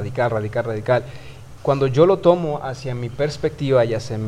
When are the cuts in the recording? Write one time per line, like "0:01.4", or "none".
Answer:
0:01.6